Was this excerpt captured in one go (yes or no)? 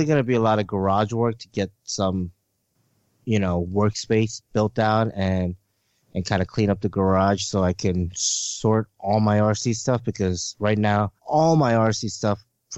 no